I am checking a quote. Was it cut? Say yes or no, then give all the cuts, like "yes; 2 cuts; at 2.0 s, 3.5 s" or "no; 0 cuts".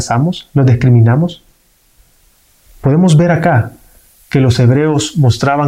no; 0 cuts